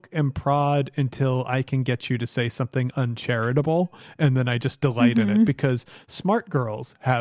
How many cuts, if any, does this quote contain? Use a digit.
0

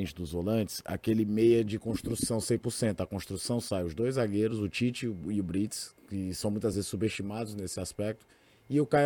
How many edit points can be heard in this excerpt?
0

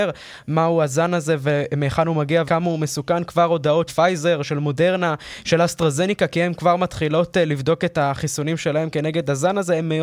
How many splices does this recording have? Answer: 2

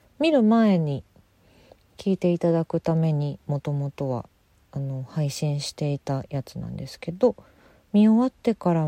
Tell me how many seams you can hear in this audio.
0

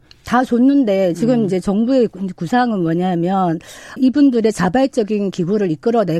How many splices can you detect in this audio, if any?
1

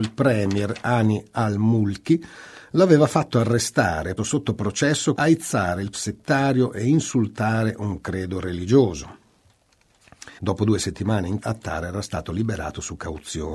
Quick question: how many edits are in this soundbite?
5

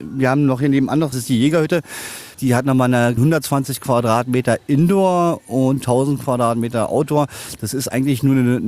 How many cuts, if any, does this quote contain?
3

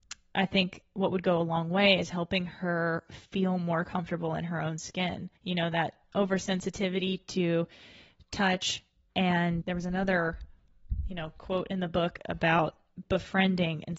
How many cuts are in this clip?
2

